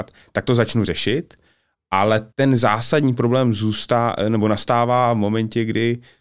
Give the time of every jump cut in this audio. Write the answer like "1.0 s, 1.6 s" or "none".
2.3 s

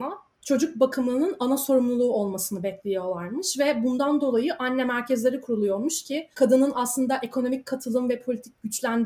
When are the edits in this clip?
6.3 s

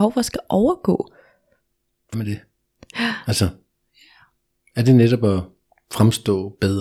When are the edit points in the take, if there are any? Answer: 2.1 s

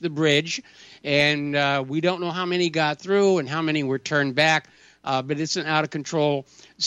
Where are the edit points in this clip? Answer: none

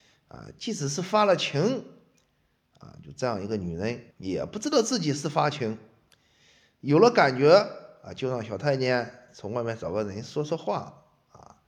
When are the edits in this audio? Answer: 4.1 s

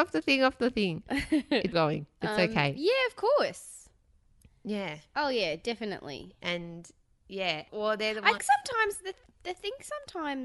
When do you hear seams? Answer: 1.7 s, 7.7 s, 8.4 s

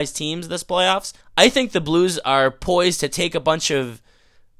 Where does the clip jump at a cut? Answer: 1.2 s

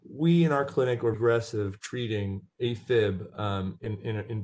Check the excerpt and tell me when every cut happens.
1.1 s

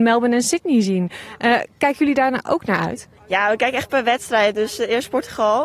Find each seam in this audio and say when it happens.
3.2 s

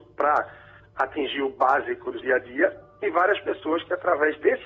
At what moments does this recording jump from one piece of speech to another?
2.2 s

